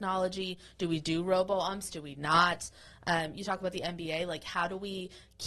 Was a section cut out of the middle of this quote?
no; 0 cuts

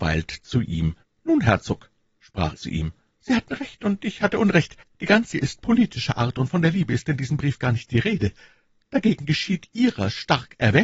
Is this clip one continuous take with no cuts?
no; 4 cuts; at 1.0 s, 2.6 s, 4.8 s, 5.3 s

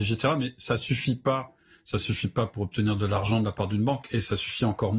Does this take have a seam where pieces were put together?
no; 0 cuts

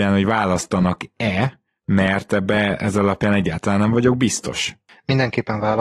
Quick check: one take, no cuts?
yes; 0 cuts

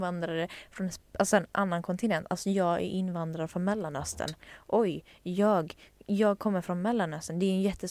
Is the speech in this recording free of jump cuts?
yes; 0 cuts

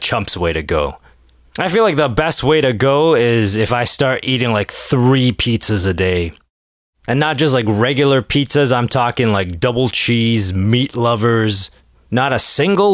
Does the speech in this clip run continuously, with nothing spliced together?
yes; 0 cuts

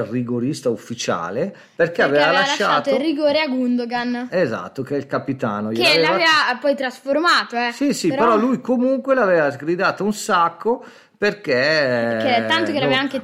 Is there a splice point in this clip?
no; 0 cuts

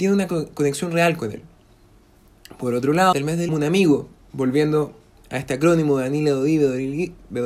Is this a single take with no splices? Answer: no; 2 cuts; at 3.1 s, 3.5 s

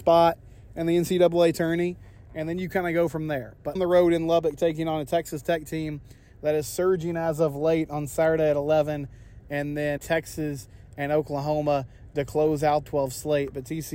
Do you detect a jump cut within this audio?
yes; 3 cuts; at 3.8 s, 10.0 s, 12.9 s

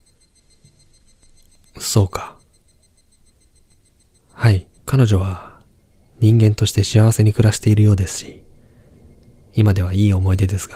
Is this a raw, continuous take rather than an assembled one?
no; 1 cut; at 4.8 s

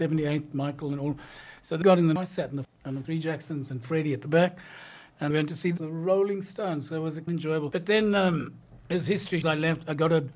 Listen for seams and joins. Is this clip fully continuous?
no; 8 cuts; at 1.8 s, 2.2 s, 2.6 s, 3.0 s, 5.3 s, 5.8 s, 7.3 s, 9.4 s

